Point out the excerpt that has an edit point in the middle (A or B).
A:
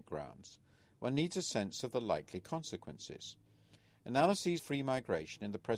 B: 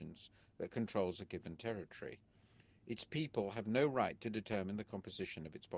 A